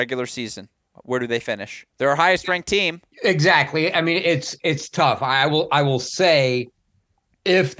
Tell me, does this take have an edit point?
yes; 2 cuts; at 1.9 s, 3.1 s

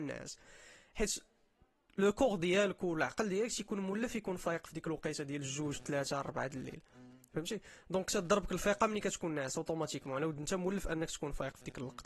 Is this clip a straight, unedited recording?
yes; 0 cuts

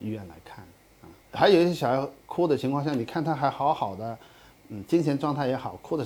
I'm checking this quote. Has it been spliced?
no; 0 cuts

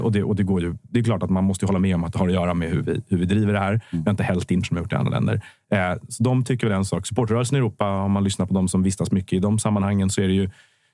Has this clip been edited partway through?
yes; 1 cut; at 4.6 s

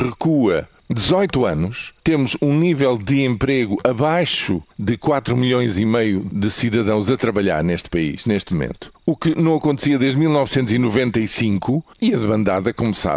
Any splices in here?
yes; 4 cuts; at 2.0 s, 4.7 s, 8.9 s, 11.9 s

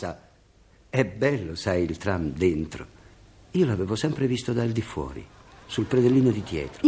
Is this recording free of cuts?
yes; 0 cuts

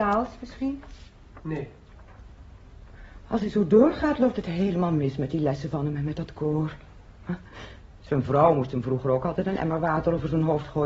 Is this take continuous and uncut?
yes; 0 cuts

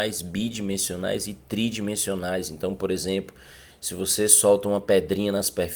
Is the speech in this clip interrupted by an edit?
no; 0 cuts

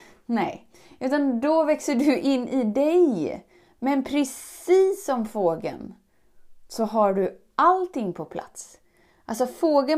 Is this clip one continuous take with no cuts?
yes; 0 cuts

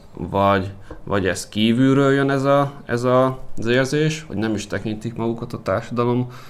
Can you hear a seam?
no; 0 cuts

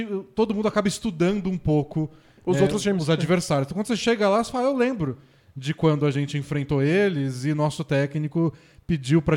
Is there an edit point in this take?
no; 0 cuts

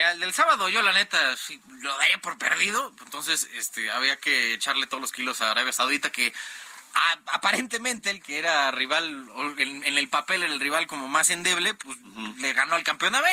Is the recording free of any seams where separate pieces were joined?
yes; 0 cuts

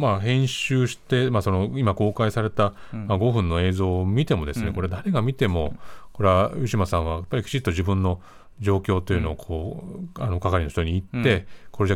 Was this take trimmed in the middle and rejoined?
no; 0 cuts

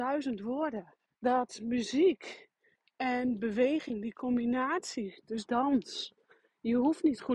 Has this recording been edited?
yes; 2 cuts; at 1.0 s, 5.5 s

